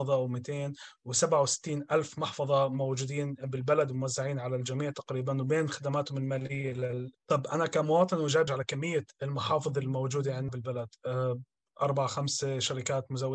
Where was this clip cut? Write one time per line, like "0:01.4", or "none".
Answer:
0:07.1
0:08.5
0:10.5